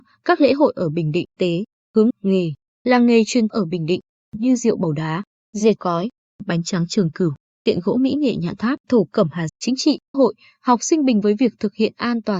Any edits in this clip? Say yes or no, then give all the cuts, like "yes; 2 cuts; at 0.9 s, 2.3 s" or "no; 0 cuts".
yes; 8 cuts; at 1.4 s, 2.1 s, 3.5 s, 5.8 s, 8.8 s, 9.5 s, 10.1 s, 11.2 s